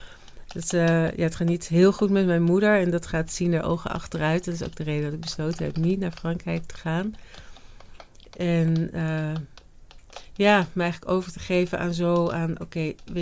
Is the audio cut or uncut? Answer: uncut